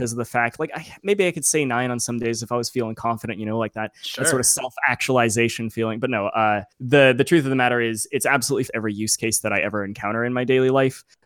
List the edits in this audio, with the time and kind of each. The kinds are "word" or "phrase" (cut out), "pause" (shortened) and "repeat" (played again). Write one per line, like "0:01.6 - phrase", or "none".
0:06.7 - pause
0:08.7 - phrase

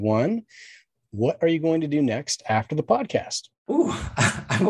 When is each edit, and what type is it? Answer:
none

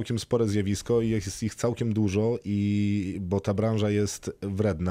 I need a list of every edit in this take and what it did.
none

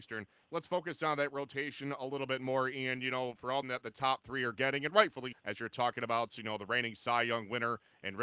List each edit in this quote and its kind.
0:03.6 - phrase
0:05.3 - word

